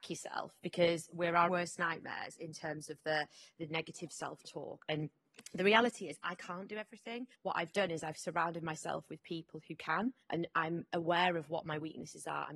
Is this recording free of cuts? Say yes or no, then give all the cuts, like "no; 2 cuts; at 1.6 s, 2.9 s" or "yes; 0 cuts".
no; 4 cuts; at 1.5 s, 3.6 s, 7.3 s, 10.2 s